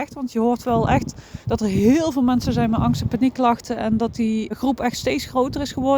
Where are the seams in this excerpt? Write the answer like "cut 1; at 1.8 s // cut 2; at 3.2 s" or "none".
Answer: cut 1; at 1.4 s // cut 2; at 4.5 s